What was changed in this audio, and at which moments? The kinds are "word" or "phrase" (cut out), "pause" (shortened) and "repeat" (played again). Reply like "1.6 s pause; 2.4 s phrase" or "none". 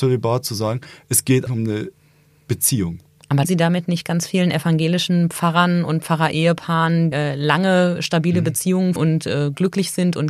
1.5 s word; 3.4 s word; 7.1 s word; 9.0 s word

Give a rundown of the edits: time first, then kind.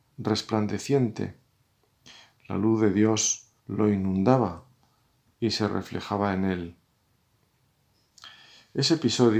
3.6 s pause

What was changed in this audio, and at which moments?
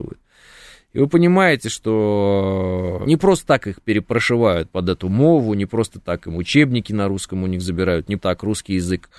3.1 s word; 8.2 s word

